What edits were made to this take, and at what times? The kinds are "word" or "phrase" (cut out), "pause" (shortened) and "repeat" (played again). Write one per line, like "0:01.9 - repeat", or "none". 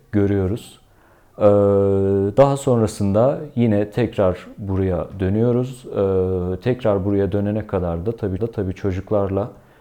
0:08.4 - repeat

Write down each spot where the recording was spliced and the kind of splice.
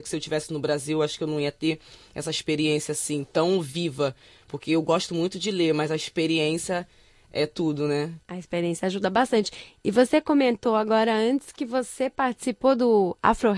none

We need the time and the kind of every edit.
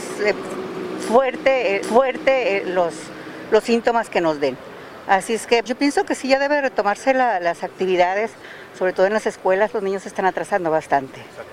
0:01.8 - repeat
0:05.7 - word

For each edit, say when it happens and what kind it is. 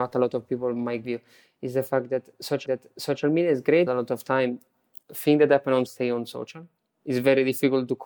0:01.0 - word
0:02.7 - repeat
0:03.9 - word
0:05.0 - pause
0:05.9 - word

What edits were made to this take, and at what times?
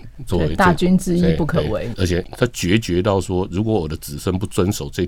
0:01.9 - word

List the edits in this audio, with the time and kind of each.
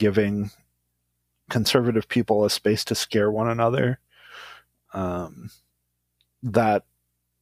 none

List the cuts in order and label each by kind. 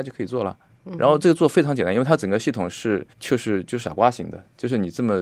0:03.1 - pause

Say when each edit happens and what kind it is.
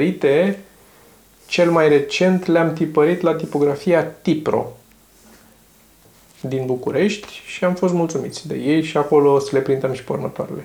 none

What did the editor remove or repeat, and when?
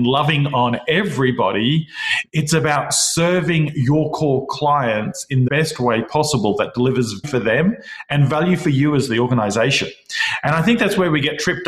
0:05.5 - word
0:07.2 - word

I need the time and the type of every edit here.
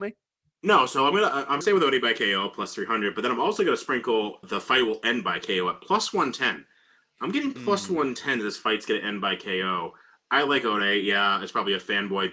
0:01.6 - word
0:04.4 - word

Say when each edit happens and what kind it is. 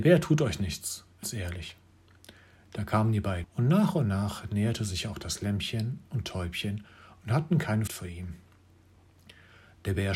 0:01.2 - word
0:03.4 - word
0:07.9 - word

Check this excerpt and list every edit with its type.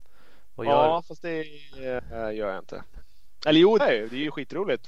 0:03.8 - word

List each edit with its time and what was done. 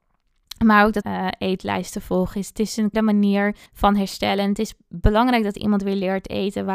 0:01.0 - phrase
0:02.9 - word
0:03.7 - pause

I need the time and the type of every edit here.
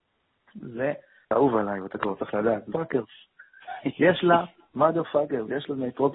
0:01.3 - word
0:02.7 - word

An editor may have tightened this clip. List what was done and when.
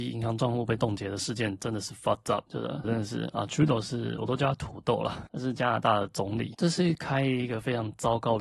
0:02.8 - word

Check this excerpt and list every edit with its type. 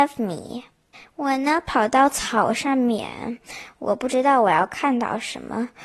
0:00.9 - pause

